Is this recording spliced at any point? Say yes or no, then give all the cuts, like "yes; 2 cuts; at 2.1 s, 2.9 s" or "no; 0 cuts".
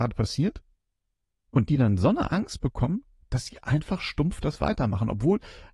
no; 0 cuts